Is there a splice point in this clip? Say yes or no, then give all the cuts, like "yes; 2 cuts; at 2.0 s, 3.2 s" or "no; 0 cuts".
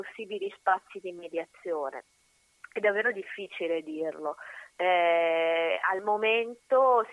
no; 0 cuts